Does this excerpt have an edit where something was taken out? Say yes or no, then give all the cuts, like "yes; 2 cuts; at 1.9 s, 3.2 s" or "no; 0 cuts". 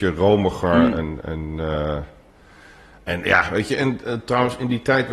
no; 0 cuts